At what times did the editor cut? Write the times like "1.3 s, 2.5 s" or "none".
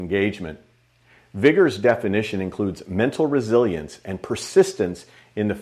none